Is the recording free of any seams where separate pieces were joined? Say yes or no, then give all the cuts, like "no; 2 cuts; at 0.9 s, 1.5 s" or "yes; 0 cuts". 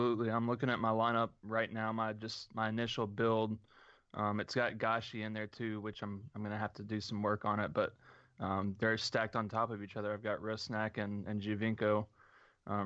yes; 0 cuts